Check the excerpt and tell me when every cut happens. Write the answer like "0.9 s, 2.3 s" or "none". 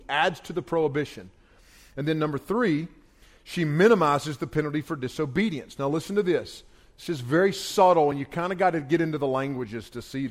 none

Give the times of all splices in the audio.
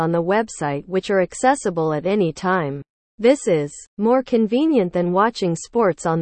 3.0 s, 3.9 s

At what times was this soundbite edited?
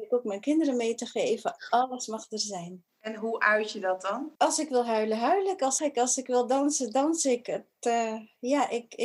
2.9 s, 4.4 s, 5.8 s

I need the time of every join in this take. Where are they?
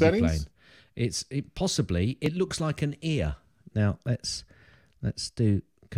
none

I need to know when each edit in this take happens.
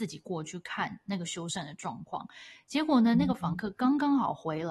none

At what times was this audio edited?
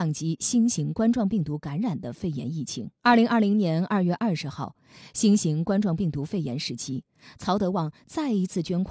3.0 s

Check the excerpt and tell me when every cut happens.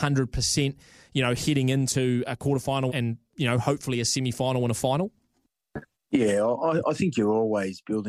2.9 s, 5.9 s

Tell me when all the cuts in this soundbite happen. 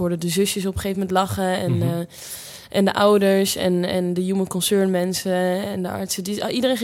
none

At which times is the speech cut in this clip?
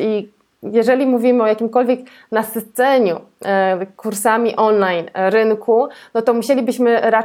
none

